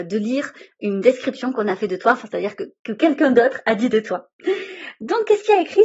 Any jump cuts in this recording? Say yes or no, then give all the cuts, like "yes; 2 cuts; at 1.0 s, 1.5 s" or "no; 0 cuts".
no; 0 cuts